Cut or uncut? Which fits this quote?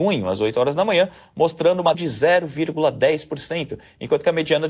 cut